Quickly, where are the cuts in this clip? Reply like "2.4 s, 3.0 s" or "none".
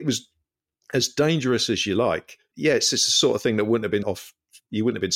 4.0 s

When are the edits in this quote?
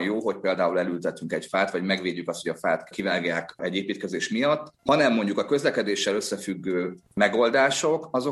none

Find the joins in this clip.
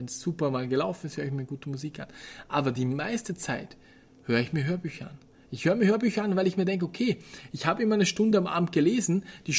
none

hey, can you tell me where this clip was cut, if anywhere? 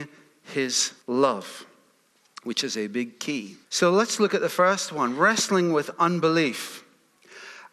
1.0 s, 3.6 s

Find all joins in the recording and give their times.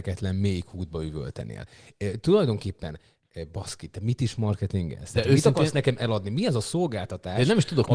none

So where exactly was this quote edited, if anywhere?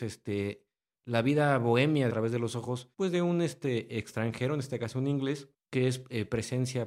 2.1 s, 2.9 s, 5.5 s

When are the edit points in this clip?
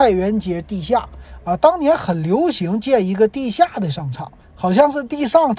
4.4 s

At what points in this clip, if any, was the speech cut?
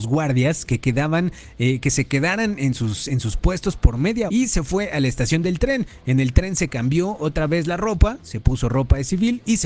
4.3 s

